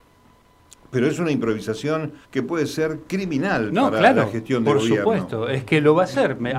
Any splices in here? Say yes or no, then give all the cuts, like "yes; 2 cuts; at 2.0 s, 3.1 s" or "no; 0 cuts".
yes; 1 cut; at 2.2 s